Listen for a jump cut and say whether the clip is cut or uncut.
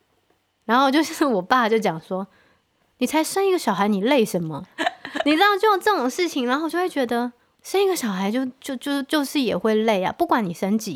uncut